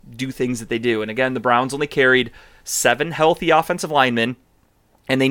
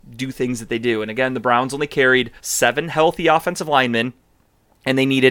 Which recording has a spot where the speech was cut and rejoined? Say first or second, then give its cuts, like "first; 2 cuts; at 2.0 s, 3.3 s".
second; 1 cut; at 2.4 s